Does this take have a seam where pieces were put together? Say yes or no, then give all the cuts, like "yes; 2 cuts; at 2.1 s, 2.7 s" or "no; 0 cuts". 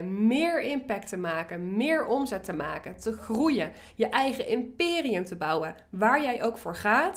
no; 0 cuts